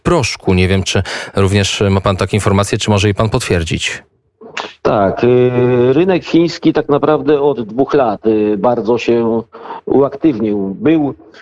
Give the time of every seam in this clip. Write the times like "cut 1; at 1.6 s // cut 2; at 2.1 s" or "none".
none